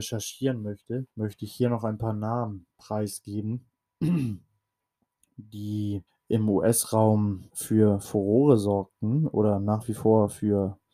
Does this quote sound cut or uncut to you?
cut